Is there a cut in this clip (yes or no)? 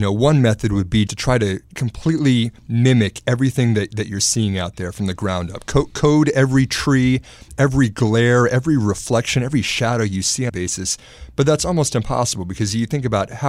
yes